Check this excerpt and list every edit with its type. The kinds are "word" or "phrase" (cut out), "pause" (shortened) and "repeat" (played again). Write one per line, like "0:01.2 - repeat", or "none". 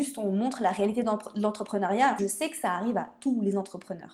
0:02.2 - word